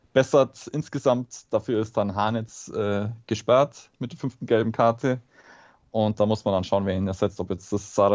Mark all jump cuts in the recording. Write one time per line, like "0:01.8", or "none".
none